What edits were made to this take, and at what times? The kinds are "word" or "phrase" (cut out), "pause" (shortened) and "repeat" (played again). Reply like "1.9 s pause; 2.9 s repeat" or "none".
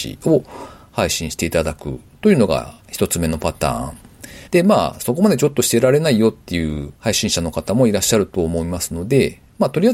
2.8 s pause; 4.5 s pause

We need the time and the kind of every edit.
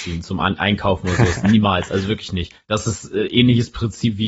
2.6 s pause

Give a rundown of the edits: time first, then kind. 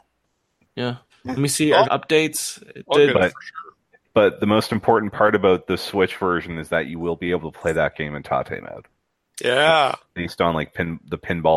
1.1 s pause; 1.8 s phrase; 9.2 s pause

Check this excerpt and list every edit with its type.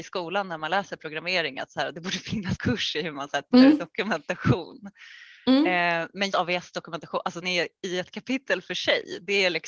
2.5 s word; 3.5 s word; 6.3 s word; 7.4 s word

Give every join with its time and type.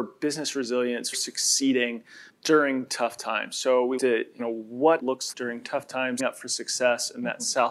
1.1 s word; 2.3 s word; 4.0 s word; 4.4 s word; 5.0 s word; 5.3 s word; 6.2 s word

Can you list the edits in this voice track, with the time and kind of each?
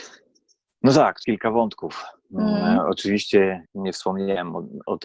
1.2 s word; 3.7 s pause

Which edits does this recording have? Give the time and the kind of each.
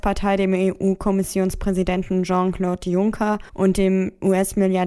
3.5 s pause

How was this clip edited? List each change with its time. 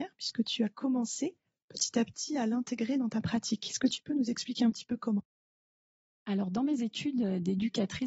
none

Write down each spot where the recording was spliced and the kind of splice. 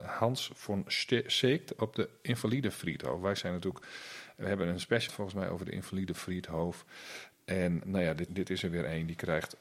5.1 s word; 7.8 s word; 8.3 s word

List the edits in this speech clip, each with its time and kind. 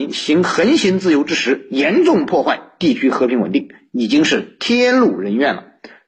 none

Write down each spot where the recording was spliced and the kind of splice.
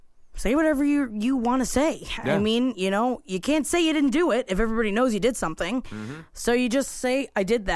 none

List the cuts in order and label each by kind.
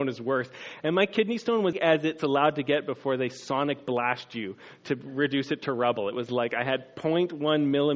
1.7 s phrase

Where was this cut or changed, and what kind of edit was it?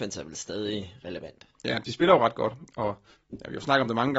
1.5 s pause; 3.1 s pause

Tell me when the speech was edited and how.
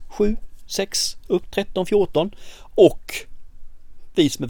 1.5 s word

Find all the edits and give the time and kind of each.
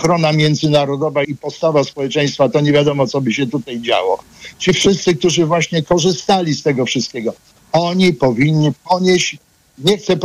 1.2 s word

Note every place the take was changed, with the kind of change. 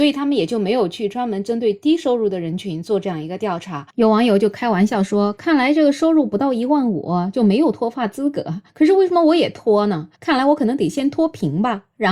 8.7 s pause; 10.1 s pause

